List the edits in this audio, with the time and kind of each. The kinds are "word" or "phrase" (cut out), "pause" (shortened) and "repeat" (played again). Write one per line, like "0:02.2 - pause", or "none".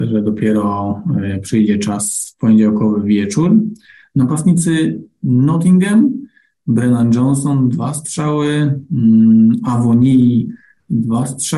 none

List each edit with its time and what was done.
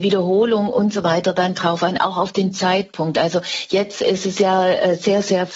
none

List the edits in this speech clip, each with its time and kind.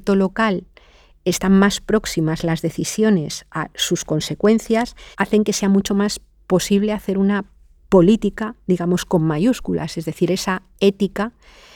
0:05.1 - pause

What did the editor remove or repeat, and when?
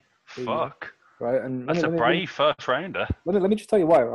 none

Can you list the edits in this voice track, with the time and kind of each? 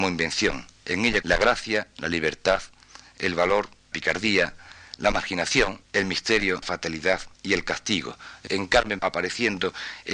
0:01.2 - word
0:03.9 - word
0:05.8 - pause
0:06.6 - word
0:07.3 - pause
0:08.5 - word
0:09.0 - word

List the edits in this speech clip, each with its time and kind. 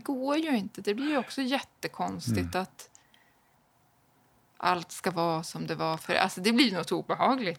none

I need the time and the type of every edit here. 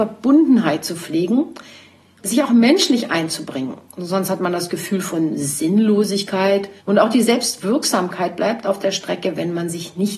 0:02.2 - word
0:06.8 - pause

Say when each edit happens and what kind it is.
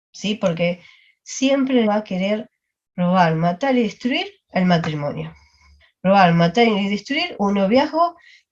0:01.8 - word
0:05.8 - pause

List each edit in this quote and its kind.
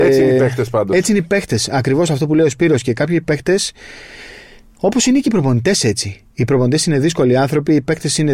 none

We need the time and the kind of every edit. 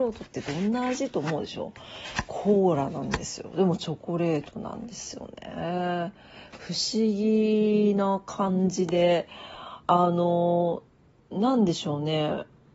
none

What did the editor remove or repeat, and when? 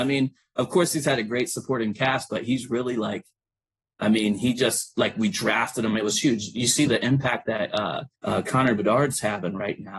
0:08.2 - pause

